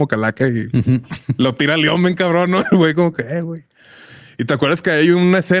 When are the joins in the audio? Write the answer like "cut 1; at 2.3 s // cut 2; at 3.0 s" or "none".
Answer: none